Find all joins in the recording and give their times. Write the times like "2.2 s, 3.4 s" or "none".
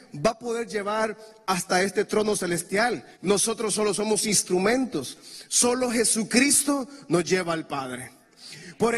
3.1 s